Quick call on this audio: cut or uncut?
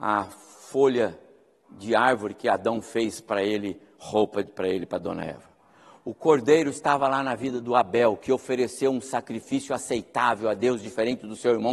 uncut